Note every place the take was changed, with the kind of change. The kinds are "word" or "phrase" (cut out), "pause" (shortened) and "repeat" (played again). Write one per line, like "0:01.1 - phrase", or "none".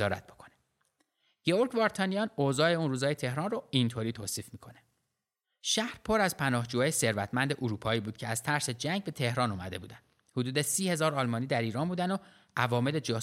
none